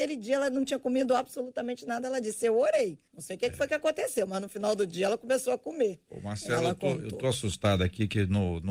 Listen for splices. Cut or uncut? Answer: cut